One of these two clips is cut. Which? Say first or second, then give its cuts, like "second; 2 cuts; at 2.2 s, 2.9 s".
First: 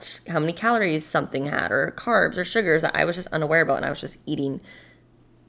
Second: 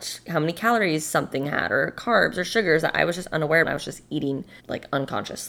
second; 2 cuts; at 3.6 s, 4.6 s